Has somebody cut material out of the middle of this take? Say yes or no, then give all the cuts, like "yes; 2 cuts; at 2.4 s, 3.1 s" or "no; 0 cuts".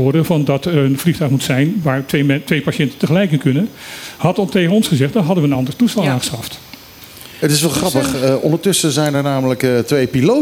no; 0 cuts